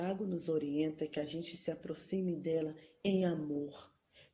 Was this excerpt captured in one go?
yes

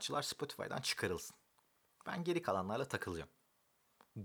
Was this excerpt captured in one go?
yes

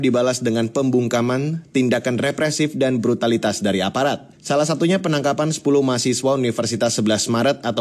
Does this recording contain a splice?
yes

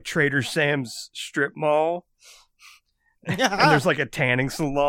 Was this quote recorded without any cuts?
yes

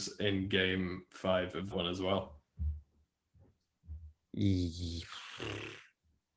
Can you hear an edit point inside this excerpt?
yes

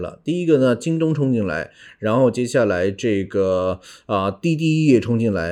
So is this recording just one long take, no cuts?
yes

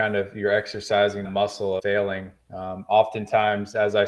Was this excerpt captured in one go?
no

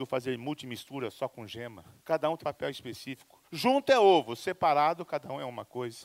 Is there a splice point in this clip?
yes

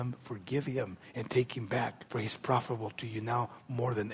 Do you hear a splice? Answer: yes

